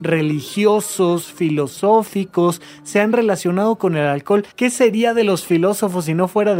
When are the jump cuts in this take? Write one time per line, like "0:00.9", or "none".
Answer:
0:04.5